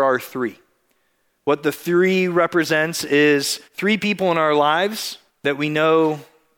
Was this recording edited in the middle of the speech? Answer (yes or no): yes